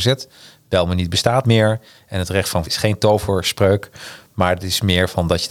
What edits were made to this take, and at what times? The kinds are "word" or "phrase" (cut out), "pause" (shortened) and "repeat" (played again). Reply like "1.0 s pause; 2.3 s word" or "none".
1.4 s word; 2.6 s word